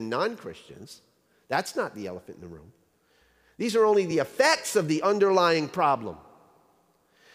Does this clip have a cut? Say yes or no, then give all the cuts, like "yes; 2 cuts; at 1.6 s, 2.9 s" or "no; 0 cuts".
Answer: no; 0 cuts